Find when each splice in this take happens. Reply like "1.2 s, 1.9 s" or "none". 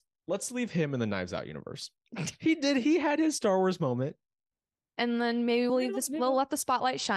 none